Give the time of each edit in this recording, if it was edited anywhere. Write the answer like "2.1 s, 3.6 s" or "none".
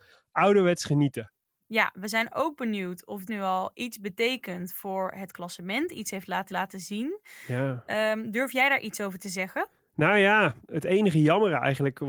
3.3 s, 6.5 s